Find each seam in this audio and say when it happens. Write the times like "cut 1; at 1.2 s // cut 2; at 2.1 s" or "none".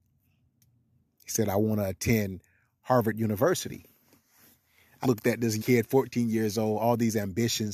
cut 1; at 5.0 s // cut 2; at 5.6 s